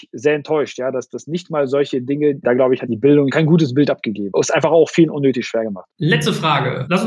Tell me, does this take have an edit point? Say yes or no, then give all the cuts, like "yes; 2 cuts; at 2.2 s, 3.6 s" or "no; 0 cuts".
yes; 1 cut; at 5.9 s